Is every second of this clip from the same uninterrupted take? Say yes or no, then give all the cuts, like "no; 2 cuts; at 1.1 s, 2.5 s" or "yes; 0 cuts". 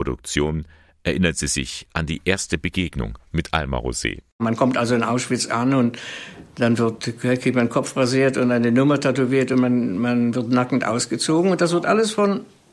yes; 0 cuts